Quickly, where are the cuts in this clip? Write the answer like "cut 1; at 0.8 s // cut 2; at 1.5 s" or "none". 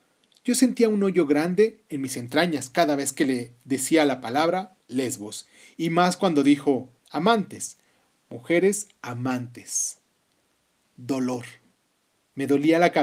cut 1; at 7.0 s